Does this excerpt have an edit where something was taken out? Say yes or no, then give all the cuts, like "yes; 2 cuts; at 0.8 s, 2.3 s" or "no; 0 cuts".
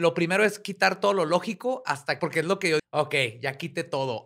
yes; 2 cuts; at 2.2 s, 2.8 s